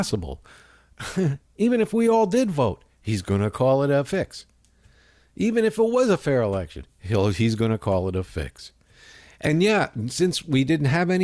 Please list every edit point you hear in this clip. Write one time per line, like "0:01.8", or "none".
none